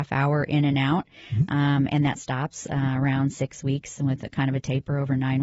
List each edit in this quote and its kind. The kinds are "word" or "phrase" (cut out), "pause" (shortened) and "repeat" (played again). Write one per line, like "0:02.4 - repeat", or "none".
none